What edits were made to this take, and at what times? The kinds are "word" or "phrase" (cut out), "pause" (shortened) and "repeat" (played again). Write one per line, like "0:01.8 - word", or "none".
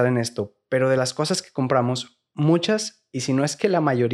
none